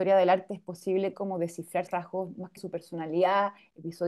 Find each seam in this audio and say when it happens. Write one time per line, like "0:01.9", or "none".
0:01.1
0:01.9
0:02.6